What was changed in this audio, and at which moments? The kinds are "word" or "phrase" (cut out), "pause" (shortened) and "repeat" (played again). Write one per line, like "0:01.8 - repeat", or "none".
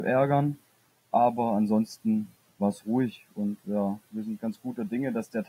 none

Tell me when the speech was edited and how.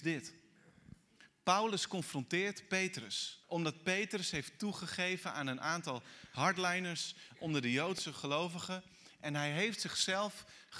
0:03.4 - pause

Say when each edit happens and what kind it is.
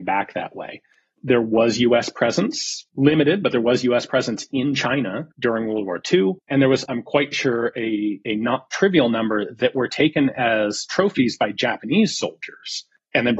0:02.9 - pause
0:05.3 - pause
0:06.4 - pause
0:06.9 - word

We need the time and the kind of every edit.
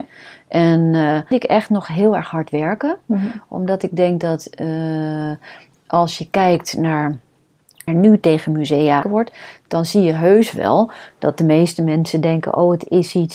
0:01.3 - phrase
0:07.9 - phrase
0:09.0 - word

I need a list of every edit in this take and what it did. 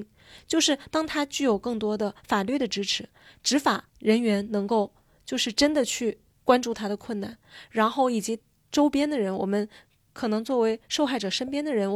0:03.9 - pause

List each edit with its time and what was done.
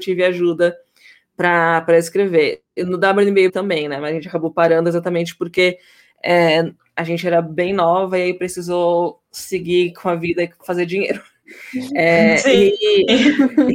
0:03.5 - word

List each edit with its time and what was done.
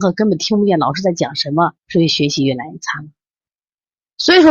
0:01.8 - pause

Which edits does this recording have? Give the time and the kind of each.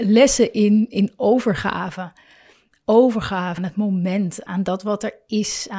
0:03.6 - word
0:04.5 - word

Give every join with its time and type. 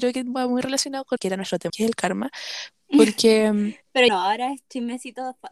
0:01.2 - word
0:01.7 - word
0:04.1 - word

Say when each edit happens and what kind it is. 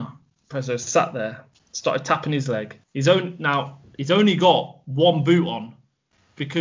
0:02.8 - pause

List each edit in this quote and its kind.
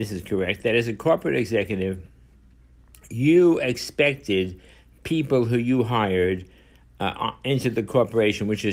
none

